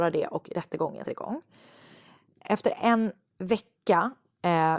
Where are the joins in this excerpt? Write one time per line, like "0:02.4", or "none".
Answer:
0:01.0